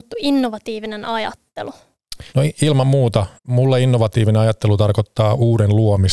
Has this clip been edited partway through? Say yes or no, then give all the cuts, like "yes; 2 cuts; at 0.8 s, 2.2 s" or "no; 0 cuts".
yes; 2 cuts; at 2.3 s, 3.4 s